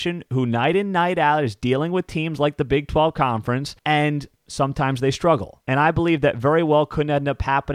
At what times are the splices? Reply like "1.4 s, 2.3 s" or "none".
3.8 s, 5.6 s